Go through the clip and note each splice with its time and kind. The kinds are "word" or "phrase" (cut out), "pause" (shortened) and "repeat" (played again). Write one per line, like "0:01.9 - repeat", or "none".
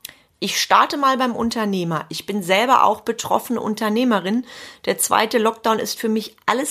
none